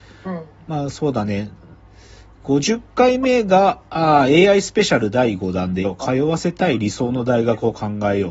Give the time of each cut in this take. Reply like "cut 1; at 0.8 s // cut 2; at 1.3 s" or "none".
cut 1; at 5.8 s

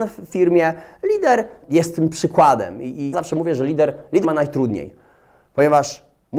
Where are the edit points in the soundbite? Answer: cut 1; at 1.6 s // cut 2; at 3.1 s // cut 3; at 4.2 s

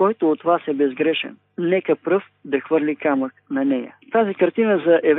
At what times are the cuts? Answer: cut 1; at 4.0 s

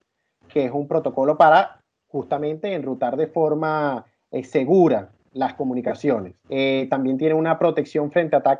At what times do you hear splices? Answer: cut 1; at 6.4 s

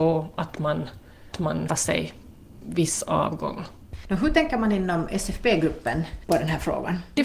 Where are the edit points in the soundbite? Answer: cut 1; at 1.3 s // cut 2; at 1.7 s // cut 3; at 2.6 s

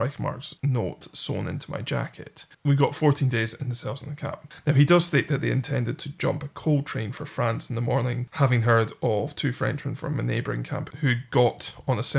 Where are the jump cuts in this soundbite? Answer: cut 1; at 2.5 s

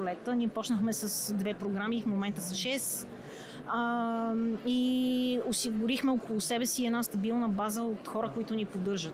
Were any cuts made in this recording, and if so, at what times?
none

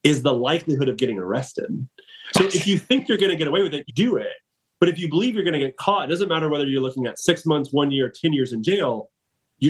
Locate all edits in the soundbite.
cut 1; at 3.9 s

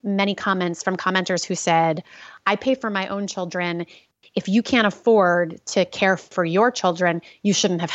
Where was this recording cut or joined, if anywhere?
none

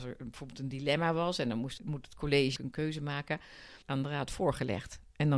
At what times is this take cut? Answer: cut 1; at 1.8 s // cut 2; at 2.6 s // cut 3; at 3.8 s

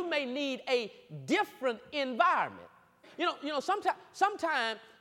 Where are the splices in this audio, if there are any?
cut 1; at 3.0 s

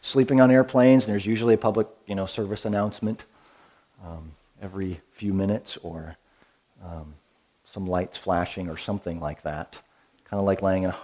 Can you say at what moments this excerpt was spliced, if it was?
none

